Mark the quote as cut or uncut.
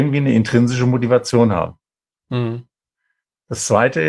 uncut